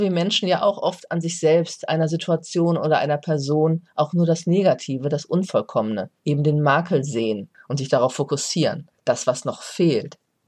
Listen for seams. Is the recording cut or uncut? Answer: cut